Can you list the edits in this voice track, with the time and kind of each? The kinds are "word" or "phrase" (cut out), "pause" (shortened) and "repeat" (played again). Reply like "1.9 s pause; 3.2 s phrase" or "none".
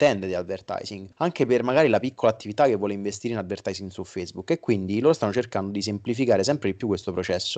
1.1 s pause